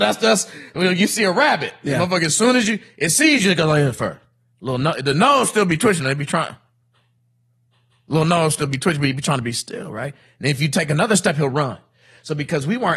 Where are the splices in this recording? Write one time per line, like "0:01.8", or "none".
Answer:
none